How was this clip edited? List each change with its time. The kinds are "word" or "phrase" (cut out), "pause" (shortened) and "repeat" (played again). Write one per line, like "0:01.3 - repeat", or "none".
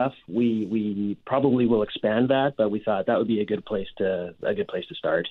none